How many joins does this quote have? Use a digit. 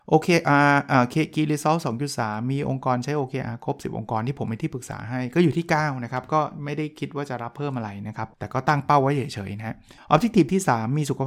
2